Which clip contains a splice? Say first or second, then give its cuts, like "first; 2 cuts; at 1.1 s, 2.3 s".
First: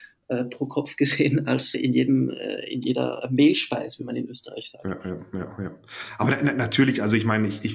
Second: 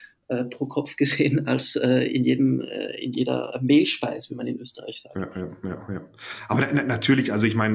first; 1 cut; at 1.7 s